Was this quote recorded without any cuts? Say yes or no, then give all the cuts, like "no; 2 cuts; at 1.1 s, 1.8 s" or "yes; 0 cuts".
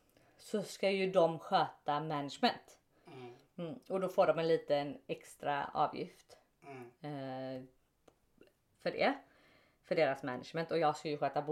yes; 0 cuts